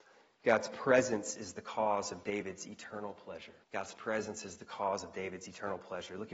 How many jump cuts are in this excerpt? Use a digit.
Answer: 1